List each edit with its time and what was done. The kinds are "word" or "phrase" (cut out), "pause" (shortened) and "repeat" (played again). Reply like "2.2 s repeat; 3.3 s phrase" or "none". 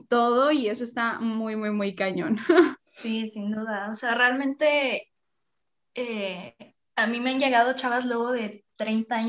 2.8 s pause; 6.8 s pause

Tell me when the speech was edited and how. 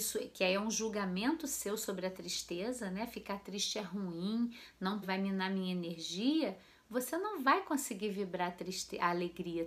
5.0 s word

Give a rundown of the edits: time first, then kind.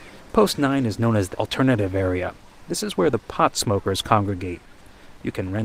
1.3 s word

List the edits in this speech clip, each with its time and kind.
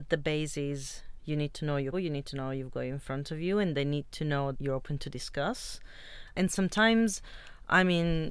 1.9 s word; 4.5 s word; 6.3 s word

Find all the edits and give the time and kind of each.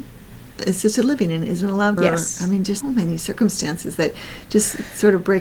2.0 s phrase; 2.8 s word

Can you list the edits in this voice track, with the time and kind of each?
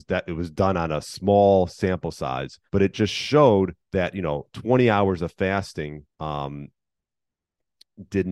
2.7 s pause; 3.8 s pause; 6.1 s pause

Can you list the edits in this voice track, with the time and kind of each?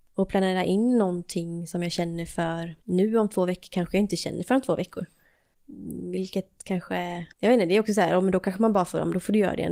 2.8 s pause; 7.3 s pause

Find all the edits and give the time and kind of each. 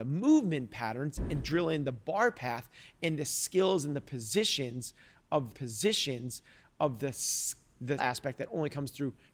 5.5 s repeat; 8.0 s word

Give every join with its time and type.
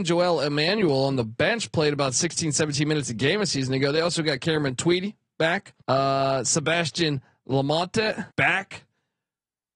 5.8 s pause; 8.3 s pause

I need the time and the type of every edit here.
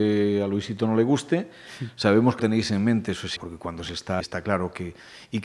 2.4 s word; 3.4 s word; 4.2 s word

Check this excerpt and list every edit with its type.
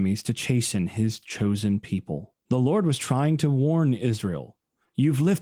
2.4 s pause

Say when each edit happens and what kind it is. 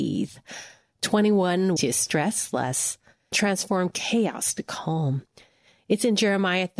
1.8 s word; 3.3 s word

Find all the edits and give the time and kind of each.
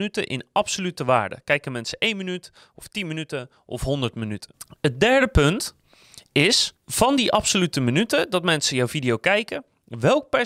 6.8 s pause

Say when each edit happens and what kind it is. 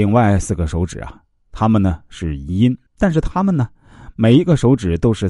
2.9 s pause

